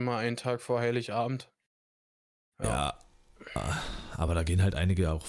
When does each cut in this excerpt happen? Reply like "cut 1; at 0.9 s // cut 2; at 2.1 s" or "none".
none